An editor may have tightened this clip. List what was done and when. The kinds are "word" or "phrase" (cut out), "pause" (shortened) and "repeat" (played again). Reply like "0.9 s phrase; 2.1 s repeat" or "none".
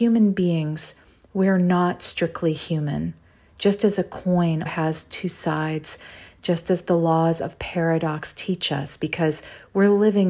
4.7 s word